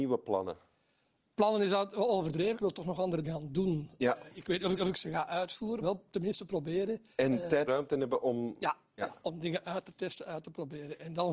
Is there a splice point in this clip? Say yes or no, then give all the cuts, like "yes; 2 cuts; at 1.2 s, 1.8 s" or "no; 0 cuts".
yes; 6 cuts; at 2.5 s, 3.2 s, 4.7 s, 5.8 s, 7.1 s, 7.7 s